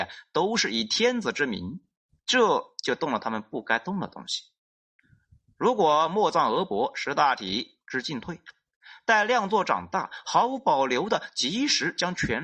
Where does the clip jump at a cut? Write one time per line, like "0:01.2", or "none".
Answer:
none